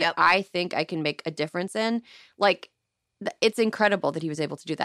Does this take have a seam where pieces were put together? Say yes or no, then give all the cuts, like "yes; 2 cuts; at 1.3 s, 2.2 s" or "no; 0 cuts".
no; 0 cuts